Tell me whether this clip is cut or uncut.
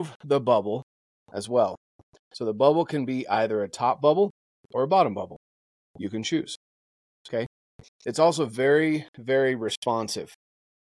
uncut